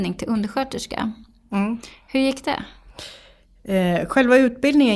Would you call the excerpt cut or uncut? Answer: uncut